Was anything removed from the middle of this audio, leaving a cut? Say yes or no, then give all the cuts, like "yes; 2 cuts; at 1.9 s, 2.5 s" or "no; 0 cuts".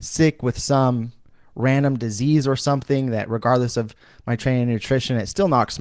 no; 0 cuts